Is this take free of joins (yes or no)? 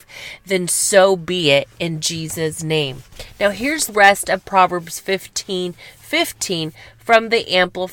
no